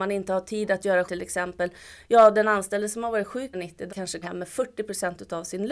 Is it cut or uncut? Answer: cut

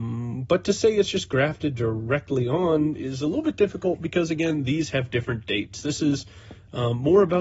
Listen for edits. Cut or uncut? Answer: uncut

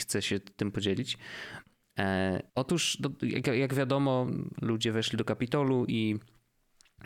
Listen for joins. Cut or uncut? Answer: cut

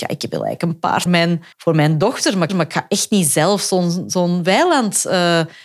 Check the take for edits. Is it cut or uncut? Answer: cut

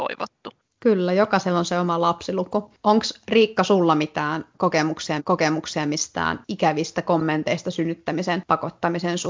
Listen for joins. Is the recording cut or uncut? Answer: cut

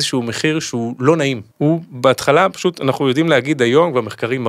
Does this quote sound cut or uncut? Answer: cut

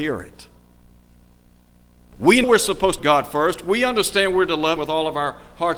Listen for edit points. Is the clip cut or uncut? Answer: cut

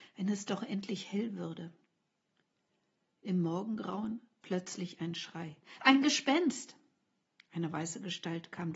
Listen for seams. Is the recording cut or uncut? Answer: uncut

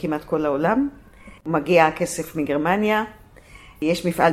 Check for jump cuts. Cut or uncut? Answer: cut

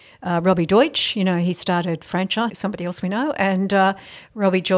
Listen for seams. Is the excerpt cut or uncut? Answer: cut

